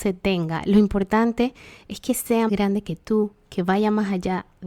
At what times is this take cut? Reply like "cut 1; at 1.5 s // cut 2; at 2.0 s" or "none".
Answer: cut 1; at 2.5 s